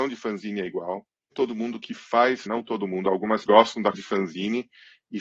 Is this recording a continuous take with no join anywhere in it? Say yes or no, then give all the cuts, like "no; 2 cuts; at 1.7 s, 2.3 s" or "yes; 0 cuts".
no; 4 cuts; at 1.3 s, 2.5 s, 3.5 s, 3.9 s